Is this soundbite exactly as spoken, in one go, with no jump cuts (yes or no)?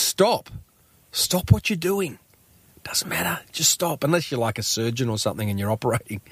yes